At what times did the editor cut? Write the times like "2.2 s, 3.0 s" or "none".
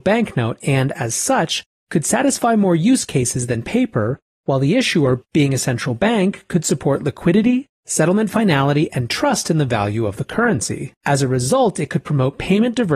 11.0 s